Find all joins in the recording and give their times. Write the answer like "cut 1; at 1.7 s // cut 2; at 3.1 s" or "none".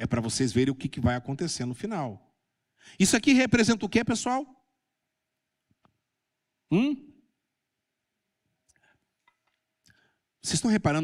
none

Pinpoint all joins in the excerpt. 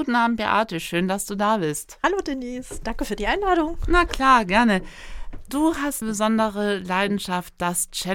cut 1; at 6.0 s

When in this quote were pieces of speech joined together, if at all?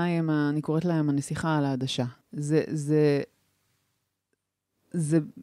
cut 1; at 2.2 s

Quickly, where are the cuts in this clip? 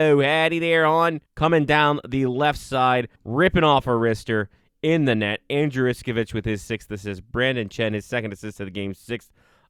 cut 1; at 1.3 s // cut 2; at 3.2 s

